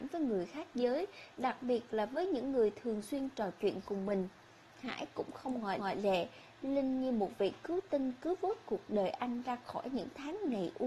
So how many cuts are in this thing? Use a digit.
1